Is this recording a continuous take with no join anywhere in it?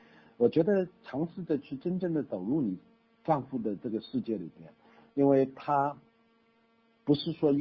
yes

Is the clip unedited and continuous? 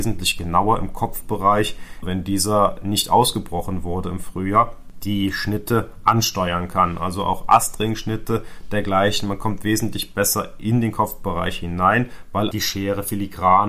no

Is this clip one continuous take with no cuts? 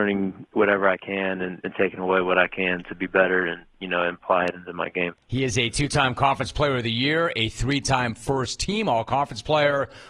no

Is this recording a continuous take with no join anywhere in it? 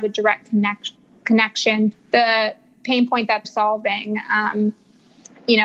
no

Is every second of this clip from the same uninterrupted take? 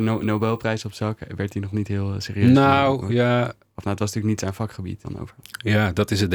no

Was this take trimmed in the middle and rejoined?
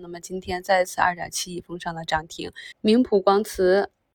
yes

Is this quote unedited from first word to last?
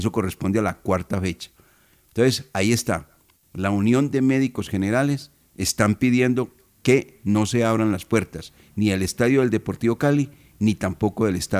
yes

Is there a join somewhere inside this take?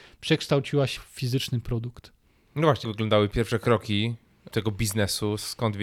yes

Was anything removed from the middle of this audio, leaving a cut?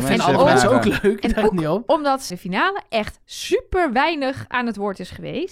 yes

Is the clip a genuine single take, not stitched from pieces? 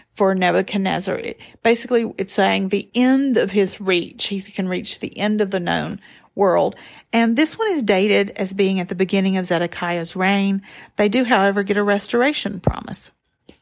yes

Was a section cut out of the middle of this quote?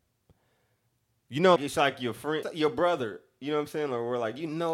yes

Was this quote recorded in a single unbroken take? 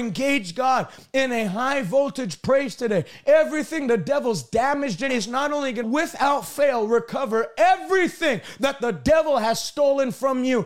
no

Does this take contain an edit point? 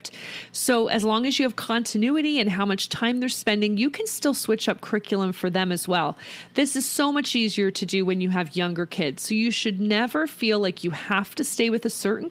no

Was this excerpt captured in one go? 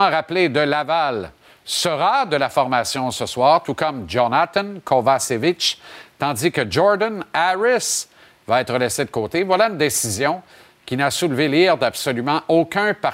yes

